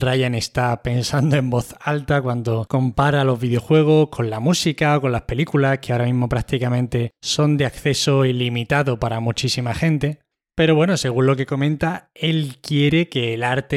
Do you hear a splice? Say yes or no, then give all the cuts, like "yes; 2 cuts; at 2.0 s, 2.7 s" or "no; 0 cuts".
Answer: no; 0 cuts